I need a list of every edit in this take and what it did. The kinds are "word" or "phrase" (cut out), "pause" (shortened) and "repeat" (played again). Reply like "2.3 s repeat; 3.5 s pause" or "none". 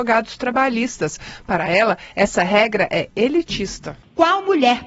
none